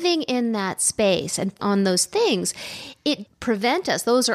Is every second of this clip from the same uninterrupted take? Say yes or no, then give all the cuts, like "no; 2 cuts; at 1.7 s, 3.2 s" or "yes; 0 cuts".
no; 2 cuts; at 1.6 s, 3.3 s